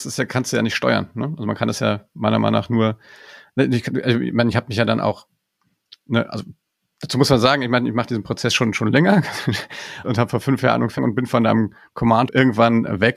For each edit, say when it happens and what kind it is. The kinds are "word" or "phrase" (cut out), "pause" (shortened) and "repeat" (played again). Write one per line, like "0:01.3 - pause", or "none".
0:10.0 - word
0:11.0 - word
0:12.3 - phrase